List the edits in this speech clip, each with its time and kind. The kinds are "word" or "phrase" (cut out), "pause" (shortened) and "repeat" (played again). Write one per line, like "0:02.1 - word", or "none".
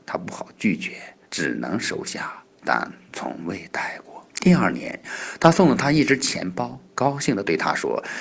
0:01.2 - pause
0:04.3 - pause

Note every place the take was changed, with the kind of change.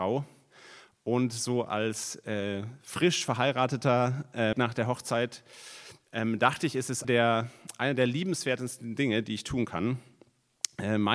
0:04.5 - phrase
0:07.0 - word

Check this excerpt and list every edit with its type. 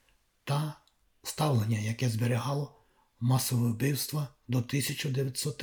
none

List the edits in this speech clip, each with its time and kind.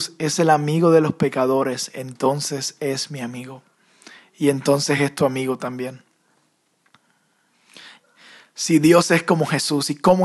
none

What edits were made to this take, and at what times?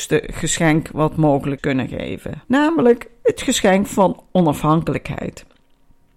0:01.6 - word
0:02.4 - pause

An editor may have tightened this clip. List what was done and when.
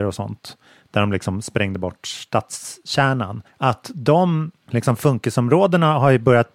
0:03.5 - pause

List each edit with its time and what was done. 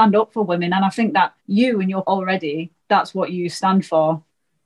0:01.4 - pause
0:02.0 - word
0:02.8 - pause

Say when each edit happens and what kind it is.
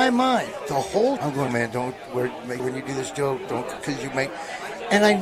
0:01.2 - word
0:01.5 - word
0:02.6 - word

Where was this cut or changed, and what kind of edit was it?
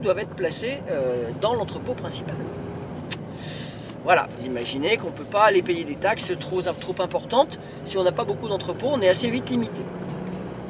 none

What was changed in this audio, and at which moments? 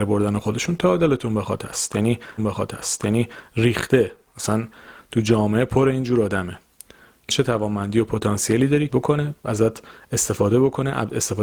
0:02.4 - repeat
0:07.3 - phrase
0:08.9 - word

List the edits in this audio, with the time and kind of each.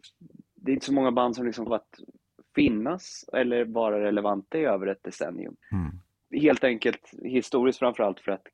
0:01.7 - word
0:05.6 - pause

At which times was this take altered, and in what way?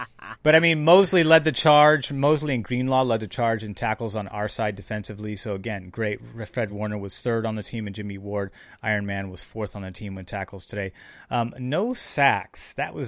none

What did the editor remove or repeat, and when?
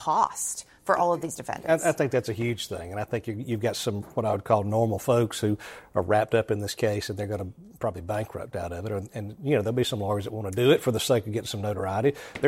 none

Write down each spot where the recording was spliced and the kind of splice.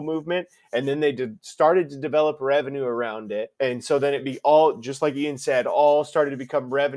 0:03.5 - pause

